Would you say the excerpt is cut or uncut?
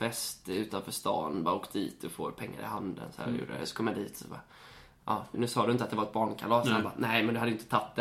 cut